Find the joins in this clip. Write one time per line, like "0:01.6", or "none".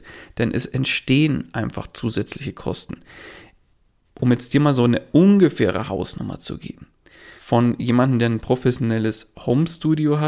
0:07.4